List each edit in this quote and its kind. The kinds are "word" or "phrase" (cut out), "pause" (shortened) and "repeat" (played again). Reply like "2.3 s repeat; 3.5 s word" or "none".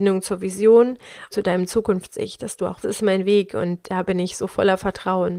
1.3 s phrase; 2.8 s phrase